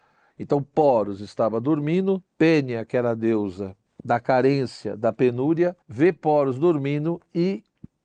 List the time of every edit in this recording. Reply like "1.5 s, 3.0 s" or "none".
2.3 s, 5.8 s